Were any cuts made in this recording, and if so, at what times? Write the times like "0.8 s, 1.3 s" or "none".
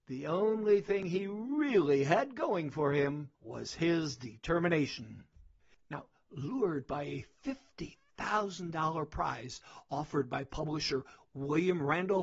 3.3 s, 5.6 s